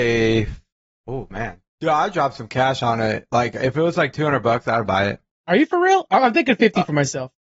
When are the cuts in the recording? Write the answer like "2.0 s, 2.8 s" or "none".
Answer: 1.7 s